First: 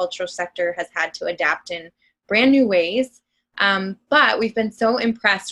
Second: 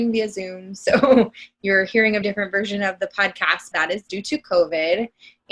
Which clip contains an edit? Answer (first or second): second